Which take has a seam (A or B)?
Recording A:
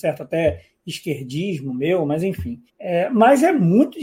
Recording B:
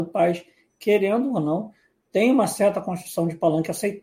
A